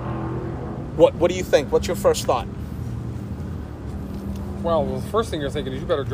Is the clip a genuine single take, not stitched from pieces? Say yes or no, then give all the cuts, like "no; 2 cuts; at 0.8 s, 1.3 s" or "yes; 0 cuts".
no; 1 cut; at 1.1 s